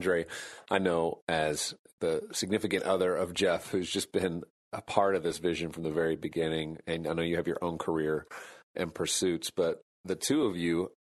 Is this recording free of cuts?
yes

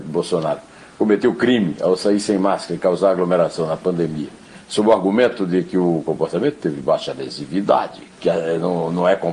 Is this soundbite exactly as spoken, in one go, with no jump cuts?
no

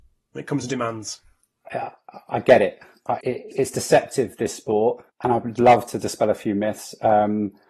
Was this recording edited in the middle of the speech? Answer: yes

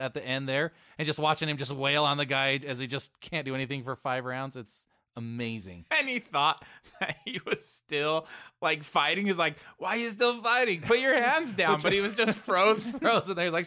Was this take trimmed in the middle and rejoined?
no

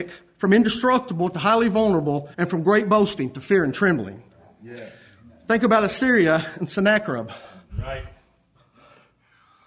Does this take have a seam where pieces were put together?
yes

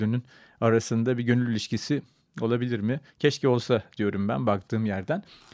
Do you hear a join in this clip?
yes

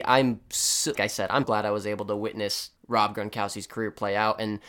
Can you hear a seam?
yes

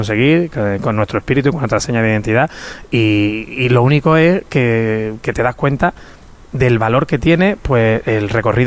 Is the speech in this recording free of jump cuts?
yes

